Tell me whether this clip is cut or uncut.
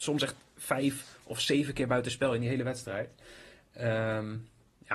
uncut